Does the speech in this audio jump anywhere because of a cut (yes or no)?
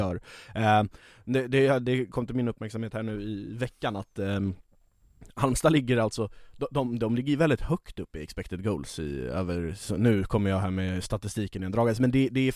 no